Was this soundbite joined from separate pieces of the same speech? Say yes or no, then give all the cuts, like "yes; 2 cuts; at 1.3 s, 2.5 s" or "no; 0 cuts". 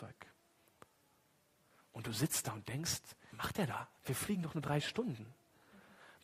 yes; 2 cuts; at 3.3 s, 4.0 s